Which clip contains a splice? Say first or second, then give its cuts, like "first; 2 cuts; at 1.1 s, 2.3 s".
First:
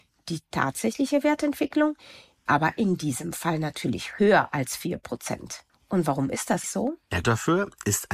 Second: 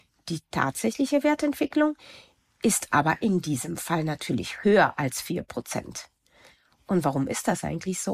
first; 4 cuts; at 2.5 s, 5.7 s, 6.6 s, 7.2 s